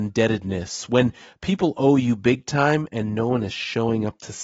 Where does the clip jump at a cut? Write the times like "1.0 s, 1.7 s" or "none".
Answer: none

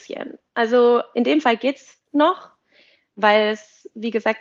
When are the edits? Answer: none

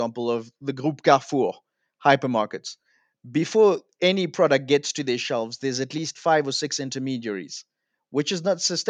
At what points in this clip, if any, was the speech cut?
none

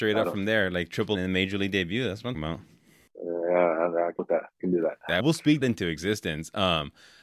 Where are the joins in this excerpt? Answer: 1.1 s, 2.3 s, 4.2 s, 4.6 s, 5.2 s, 5.6 s

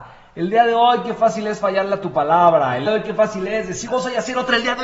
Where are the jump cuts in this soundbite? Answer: 2.9 s, 3.9 s

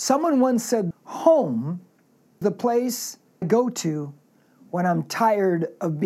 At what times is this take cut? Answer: 0.9 s, 2.4 s, 3.4 s

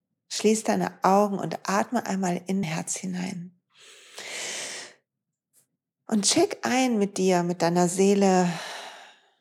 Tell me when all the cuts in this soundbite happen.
2.6 s

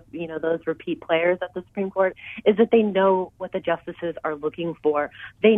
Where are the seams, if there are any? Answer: none

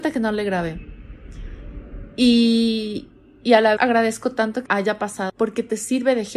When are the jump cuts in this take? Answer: 3.8 s, 4.7 s, 5.3 s

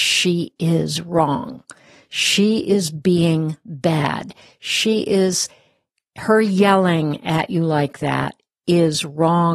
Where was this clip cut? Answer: none

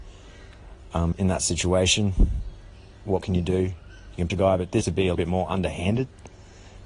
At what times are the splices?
1.1 s, 3.2 s, 4.3 s, 4.8 s, 5.1 s

